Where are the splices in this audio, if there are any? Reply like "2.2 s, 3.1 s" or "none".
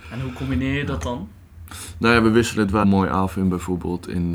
2.8 s